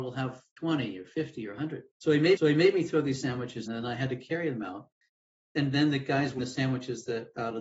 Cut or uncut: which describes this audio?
cut